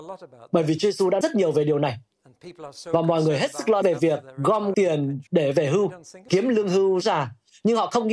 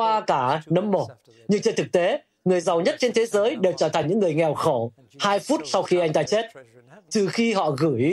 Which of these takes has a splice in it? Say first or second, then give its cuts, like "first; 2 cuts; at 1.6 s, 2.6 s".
first; 6 cuts; at 1.2 s, 3.8 s, 4.7 s, 5.3 s, 6.3 s, 7.0 s